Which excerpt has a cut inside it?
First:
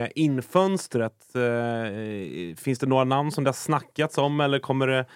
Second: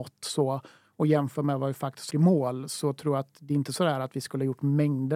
second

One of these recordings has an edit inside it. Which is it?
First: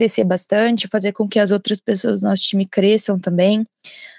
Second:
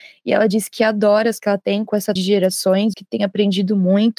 second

